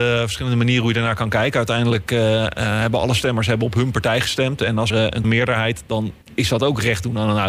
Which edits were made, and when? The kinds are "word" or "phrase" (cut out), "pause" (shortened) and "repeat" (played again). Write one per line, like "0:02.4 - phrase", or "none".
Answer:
0:04.9 - word
0:05.2 - phrase
0:06.2 - pause